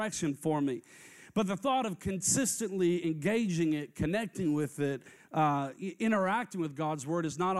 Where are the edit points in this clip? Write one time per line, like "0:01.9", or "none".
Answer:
none